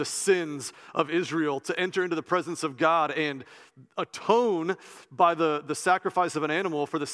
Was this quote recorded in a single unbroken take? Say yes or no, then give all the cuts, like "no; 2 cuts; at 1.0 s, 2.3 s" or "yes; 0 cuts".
yes; 0 cuts